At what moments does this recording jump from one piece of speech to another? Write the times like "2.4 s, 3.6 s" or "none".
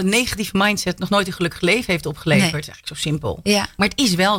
none